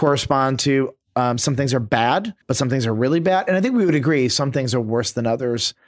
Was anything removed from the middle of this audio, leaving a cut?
yes; 1 cut; at 2.4 s

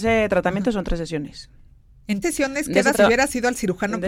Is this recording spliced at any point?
yes; 2 cuts; at 2.2 s, 2.9 s

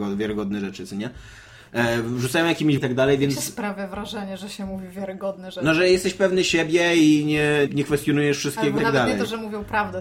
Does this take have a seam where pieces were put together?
yes; 3 cuts; at 2.8 s, 7.7 s, 8.8 s

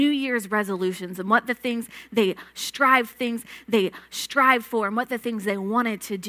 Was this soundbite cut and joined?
yes; 1 cut; at 3.1 s

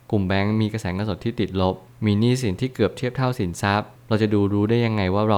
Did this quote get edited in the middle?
no; 0 cuts

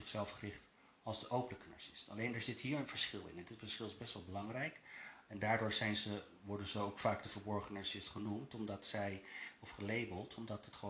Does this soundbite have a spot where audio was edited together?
no; 0 cuts

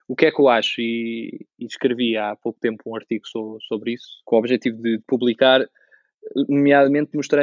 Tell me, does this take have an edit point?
no; 0 cuts

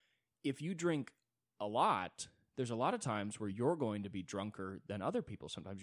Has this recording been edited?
no; 0 cuts

